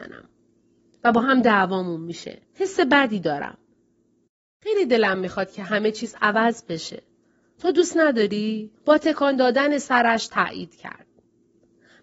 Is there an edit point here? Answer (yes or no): yes